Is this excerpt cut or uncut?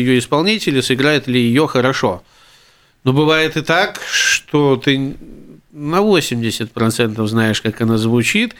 uncut